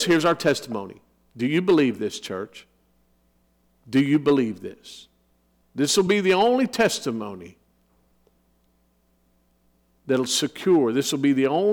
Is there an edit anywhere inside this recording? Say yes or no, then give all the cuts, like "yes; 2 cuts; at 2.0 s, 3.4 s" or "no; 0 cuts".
no; 0 cuts